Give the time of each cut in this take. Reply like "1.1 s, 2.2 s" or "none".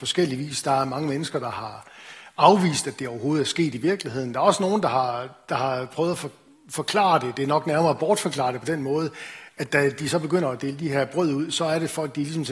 none